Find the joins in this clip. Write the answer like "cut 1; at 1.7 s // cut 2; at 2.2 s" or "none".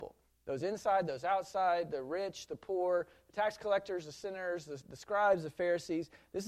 none